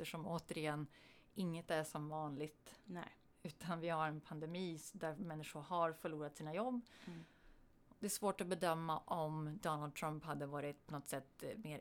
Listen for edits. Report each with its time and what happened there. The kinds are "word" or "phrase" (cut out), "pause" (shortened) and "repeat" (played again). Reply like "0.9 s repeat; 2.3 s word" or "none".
none